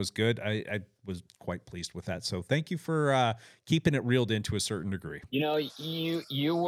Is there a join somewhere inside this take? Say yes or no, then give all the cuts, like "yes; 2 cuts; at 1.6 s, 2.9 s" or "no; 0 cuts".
no; 0 cuts